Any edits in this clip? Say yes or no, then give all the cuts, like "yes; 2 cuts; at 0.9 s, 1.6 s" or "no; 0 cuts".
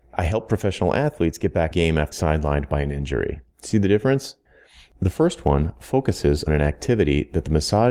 yes; 4 cuts; at 1.7 s, 2.1 s, 3.5 s, 6.5 s